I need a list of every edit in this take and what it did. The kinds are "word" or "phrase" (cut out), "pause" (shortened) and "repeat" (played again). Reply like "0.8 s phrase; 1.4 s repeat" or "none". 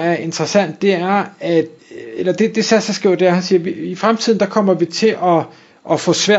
1.8 s pause